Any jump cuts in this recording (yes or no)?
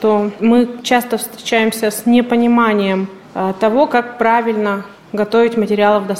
no